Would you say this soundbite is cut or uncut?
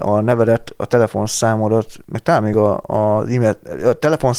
uncut